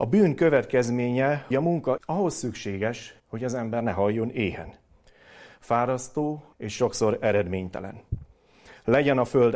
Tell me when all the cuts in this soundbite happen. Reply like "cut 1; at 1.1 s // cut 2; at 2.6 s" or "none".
cut 1; at 1.5 s // cut 2; at 2.0 s // cut 3; at 3.2 s // cut 4; at 6.5 s